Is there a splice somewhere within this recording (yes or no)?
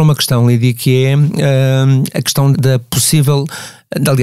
yes